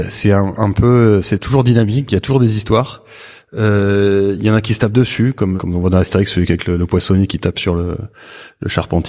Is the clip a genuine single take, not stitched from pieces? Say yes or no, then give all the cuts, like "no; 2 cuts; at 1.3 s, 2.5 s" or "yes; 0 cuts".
no; 1 cut; at 5.6 s